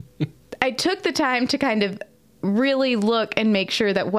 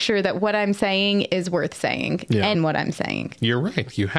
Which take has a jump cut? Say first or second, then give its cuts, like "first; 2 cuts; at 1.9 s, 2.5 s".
second; 1 cut; at 2.5 s